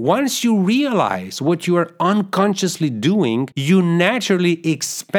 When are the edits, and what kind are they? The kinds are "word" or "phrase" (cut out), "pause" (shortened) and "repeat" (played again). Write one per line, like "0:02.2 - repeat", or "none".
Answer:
0:03.5 - pause